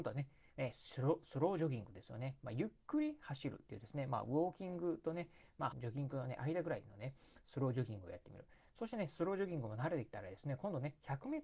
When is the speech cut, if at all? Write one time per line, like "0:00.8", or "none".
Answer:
0:05.7